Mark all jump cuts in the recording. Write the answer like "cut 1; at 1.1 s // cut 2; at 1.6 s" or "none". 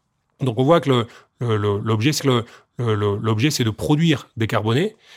cut 1; at 2.2 s

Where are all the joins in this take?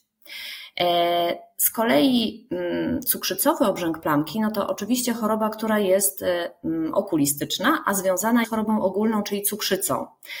cut 1; at 8.4 s

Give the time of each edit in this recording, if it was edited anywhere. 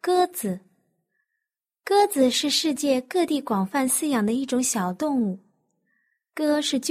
none

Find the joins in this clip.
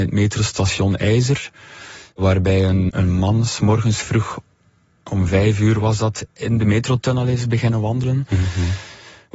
cut 1; at 2.9 s

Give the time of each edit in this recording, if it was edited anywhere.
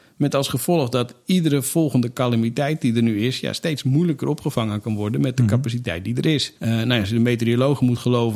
cut 1; at 6.6 s

